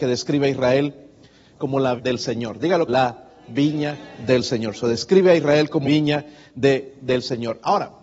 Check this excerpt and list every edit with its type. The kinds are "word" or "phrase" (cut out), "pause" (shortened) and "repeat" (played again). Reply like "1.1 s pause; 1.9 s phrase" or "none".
2.0 s word; 2.9 s word; 5.8 s word